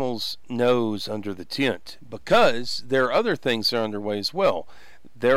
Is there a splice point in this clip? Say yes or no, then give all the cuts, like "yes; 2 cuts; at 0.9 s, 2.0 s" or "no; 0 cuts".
no; 0 cuts